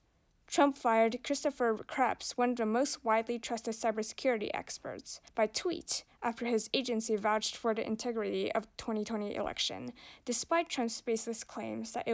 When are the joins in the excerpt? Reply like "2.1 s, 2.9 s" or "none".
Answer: 5.3 s